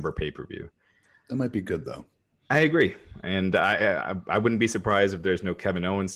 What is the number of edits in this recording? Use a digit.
0